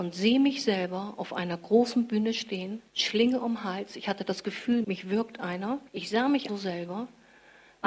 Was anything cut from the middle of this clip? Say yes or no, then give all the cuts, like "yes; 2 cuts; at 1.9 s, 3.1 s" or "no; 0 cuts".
yes; 4 cuts; at 2.9 s, 4.8 s, 5.9 s, 6.5 s